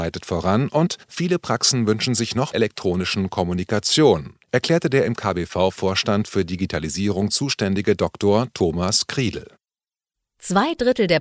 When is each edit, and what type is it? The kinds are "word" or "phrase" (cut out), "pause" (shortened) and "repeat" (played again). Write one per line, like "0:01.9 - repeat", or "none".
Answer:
0:01.0 - pause
0:02.5 - phrase
0:04.4 - pause

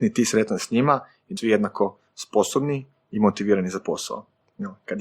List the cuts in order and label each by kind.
0:01.4 - word

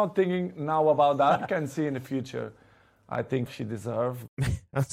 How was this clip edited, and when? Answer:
0:01.4 - word

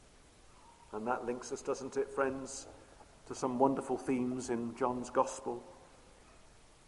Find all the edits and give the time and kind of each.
none

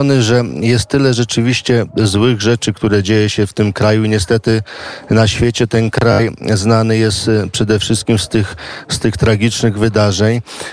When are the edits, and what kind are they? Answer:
none

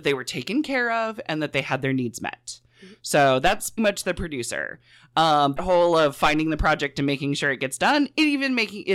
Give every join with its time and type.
0:03.8 - word
0:05.6 - word

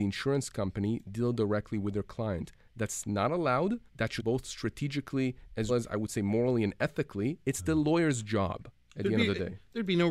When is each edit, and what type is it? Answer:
0:03.9 - pause
0:04.2 - phrase
0:05.7 - word

